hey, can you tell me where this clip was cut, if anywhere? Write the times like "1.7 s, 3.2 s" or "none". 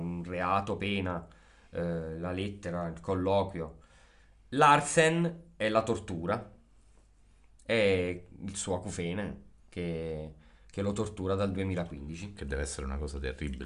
none